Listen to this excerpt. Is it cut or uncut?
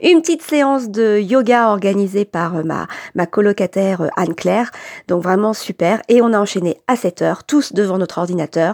uncut